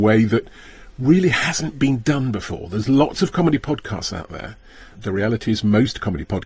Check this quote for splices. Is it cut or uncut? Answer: uncut